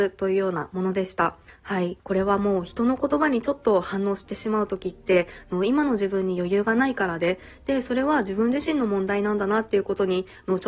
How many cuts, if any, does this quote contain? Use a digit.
2